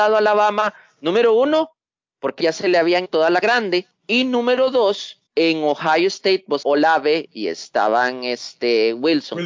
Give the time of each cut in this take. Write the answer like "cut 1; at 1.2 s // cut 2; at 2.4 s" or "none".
cut 1; at 2.4 s // cut 2; at 3.0 s // cut 3; at 3.4 s // cut 4; at 4.0 s // cut 5; at 5.3 s // cut 6; at 6.6 s